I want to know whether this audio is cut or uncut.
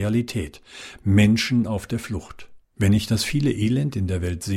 cut